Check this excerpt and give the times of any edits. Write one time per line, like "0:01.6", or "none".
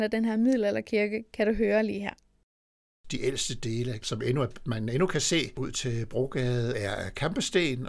0:04.0